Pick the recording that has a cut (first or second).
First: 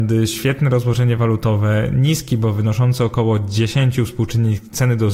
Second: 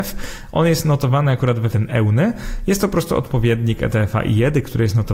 second